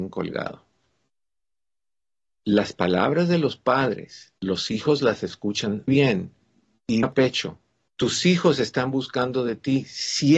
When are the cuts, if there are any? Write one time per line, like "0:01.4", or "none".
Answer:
0:04.4
0:05.9
0:07.0
0:07.9